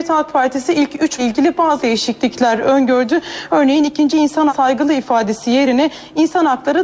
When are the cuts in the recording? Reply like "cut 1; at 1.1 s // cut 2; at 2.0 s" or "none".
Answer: cut 1; at 1.2 s // cut 2; at 1.8 s // cut 3; at 4.1 s // cut 4; at 4.5 s